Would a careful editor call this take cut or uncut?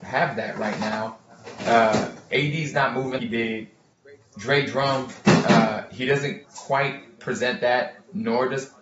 cut